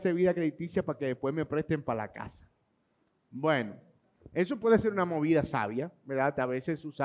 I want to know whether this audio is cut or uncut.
uncut